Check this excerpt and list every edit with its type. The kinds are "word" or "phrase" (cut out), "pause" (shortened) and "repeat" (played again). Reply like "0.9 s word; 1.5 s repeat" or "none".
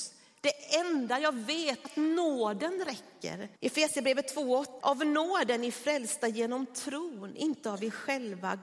1.8 s word; 3.6 s pause; 4.8 s word

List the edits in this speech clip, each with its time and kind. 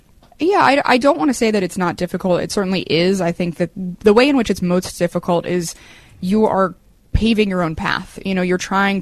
none

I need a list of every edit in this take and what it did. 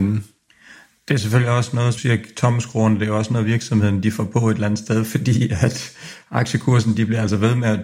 2.0 s word

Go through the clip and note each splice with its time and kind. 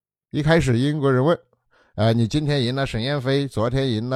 none

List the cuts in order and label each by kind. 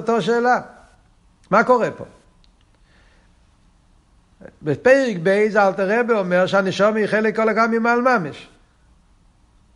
none

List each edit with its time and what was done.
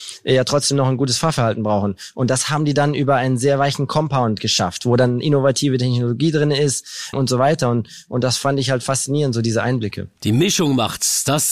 7.1 s word

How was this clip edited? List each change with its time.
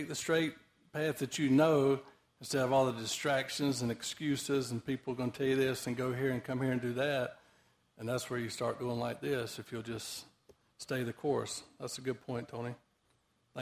none

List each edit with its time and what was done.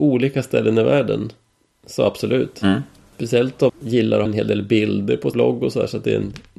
3.7 s word; 4.3 s word; 5.3 s word

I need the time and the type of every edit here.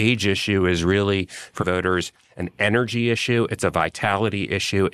1.6 s word

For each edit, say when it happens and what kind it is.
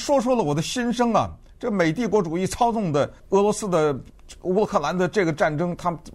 3.2 s pause

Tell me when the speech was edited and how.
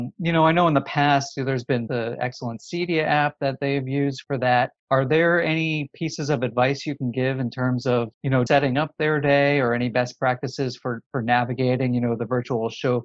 1.9 s word; 4.2 s word; 4.8 s pause; 8.1 s pause; 8.5 s word

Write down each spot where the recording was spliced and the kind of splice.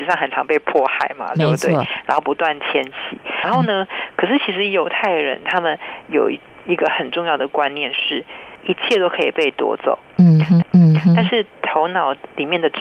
3.4 s word; 10.6 s repeat

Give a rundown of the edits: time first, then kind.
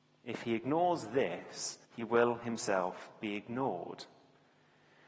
1.8 s pause

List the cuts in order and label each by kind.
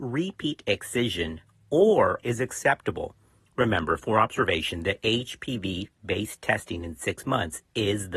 2.2 s word

